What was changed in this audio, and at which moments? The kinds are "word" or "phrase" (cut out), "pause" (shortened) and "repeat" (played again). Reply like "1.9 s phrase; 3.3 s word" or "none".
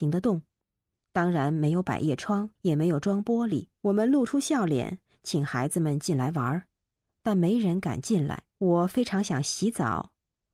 2.6 s pause; 3.7 s pause; 8.5 s pause